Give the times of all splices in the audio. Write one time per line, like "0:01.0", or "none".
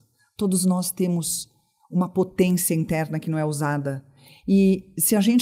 none